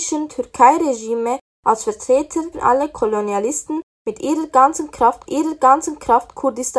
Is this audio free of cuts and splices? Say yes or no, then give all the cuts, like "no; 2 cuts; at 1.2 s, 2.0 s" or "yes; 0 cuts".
no; 2 cuts; at 2.5 s, 5.3 s